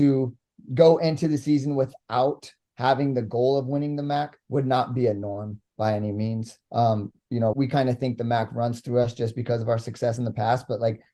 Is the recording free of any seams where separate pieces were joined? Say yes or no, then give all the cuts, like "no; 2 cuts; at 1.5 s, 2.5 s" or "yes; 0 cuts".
no; 3 cuts; at 4.4 s, 6.6 s, 7.5 s